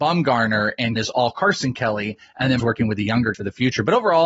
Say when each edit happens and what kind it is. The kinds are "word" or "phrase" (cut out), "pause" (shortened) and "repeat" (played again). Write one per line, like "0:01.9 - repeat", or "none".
0:01.0 - word
0:02.6 - word
0:03.3 - word

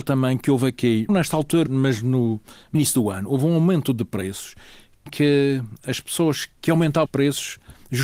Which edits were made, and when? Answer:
0:01.1 - word
0:01.7 - word
0:02.7 - word
0:05.1 - word
0:06.6 - word
0:07.1 - word

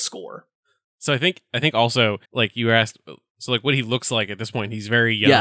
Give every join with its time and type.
0:02.2 - pause

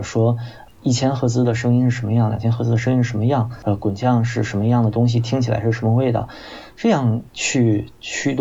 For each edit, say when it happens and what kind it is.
0:07.3 - pause

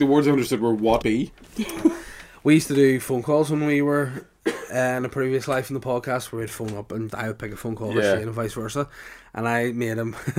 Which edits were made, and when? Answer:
0:01.0 - word
0:07.1 - word

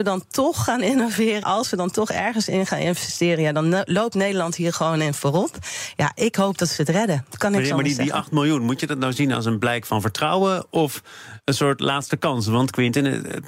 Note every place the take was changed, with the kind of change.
0:01.4 - word

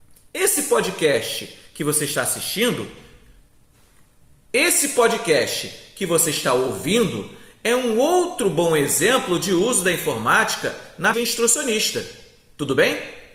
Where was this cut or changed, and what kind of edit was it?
0:11.1 - word

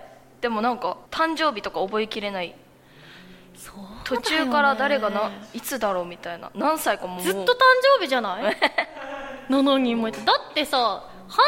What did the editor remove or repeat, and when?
0:01.1 - pause

